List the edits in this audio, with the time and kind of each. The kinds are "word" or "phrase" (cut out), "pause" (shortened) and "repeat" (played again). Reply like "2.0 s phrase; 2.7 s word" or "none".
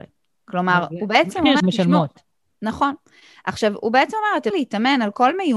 1.6 s word; 4.5 s word